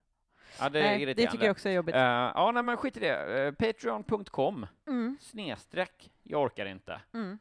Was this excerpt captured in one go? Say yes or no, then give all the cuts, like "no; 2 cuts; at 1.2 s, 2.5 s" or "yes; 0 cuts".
yes; 0 cuts